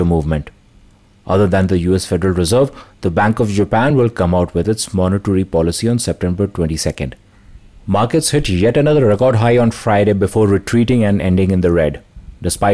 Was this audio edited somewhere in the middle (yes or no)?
no